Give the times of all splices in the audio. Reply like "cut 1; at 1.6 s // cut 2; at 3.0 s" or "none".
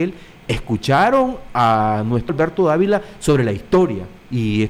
cut 1; at 2.3 s